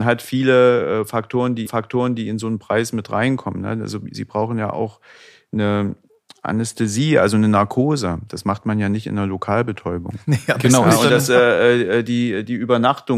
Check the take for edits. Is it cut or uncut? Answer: cut